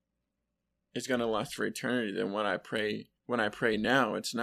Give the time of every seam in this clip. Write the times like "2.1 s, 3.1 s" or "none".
3.2 s